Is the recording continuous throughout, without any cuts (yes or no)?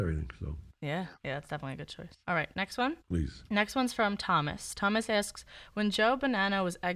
no